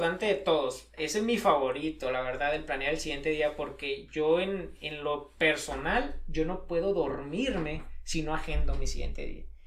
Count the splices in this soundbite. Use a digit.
1